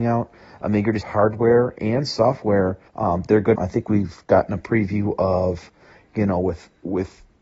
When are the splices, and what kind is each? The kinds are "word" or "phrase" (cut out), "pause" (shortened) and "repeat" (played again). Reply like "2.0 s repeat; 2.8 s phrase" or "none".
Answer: 1.0 s phrase; 2.9 s pause; 3.6 s phrase